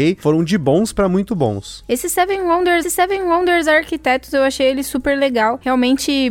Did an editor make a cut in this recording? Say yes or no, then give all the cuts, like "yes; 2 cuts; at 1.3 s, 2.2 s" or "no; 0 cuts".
yes; 1 cut; at 2.8 s